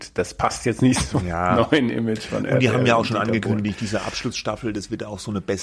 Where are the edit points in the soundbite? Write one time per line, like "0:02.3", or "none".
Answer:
none